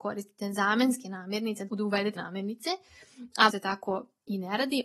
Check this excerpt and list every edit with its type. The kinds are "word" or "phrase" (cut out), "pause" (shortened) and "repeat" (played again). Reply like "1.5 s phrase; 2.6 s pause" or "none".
1.7 s word; 2.2 s word; 3.5 s phrase

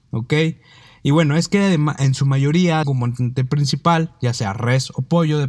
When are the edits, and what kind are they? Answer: 2.8 s phrase

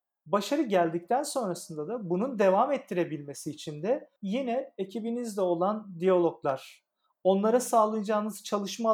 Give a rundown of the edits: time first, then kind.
4.2 s pause

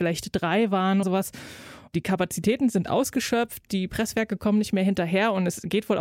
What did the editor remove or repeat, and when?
1.0 s word

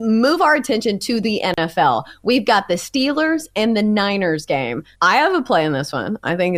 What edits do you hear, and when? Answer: 4.9 s pause

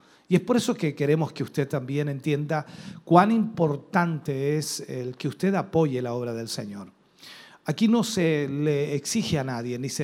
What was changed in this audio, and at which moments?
none

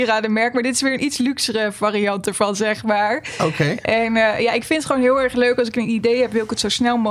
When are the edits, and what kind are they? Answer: none

